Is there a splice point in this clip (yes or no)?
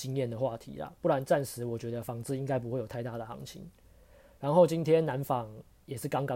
no